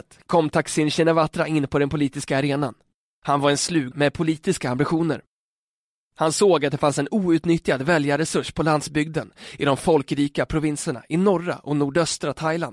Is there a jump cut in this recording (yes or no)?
yes